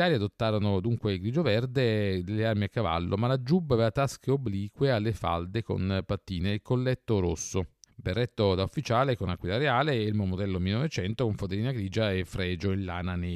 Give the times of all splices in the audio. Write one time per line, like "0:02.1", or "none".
0:07.9